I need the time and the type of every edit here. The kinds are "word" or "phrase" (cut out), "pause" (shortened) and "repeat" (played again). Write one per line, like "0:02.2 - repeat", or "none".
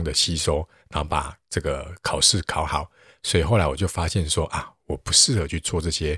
none